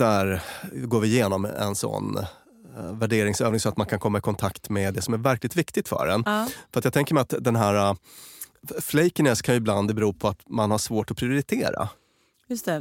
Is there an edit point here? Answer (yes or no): yes